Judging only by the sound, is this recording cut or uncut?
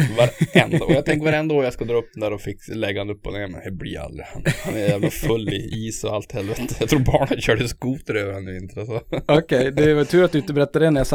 uncut